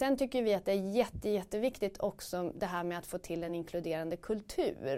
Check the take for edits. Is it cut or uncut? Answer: uncut